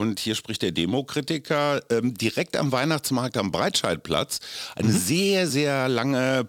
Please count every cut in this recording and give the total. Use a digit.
0